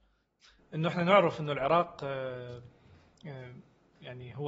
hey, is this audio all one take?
yes; 0 cuts

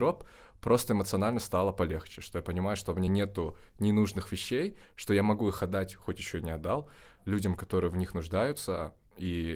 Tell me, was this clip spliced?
no; 0 cuts

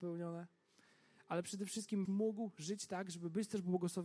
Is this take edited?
yes; 1 cut; at 2.0 s

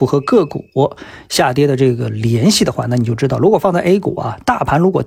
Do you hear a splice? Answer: no; 0 cuts

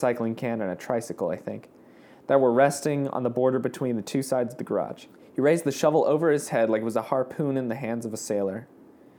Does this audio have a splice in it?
yes; 1 cut; at 5.1 s

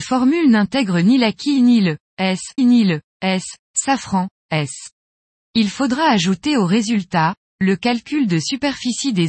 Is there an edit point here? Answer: yes; 1 cut; at 2.6 s

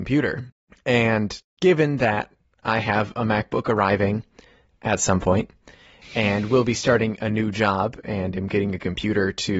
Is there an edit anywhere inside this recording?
no; 0 cuts

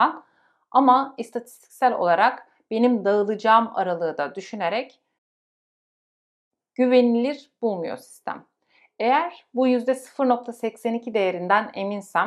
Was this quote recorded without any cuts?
yes; 0 cuts

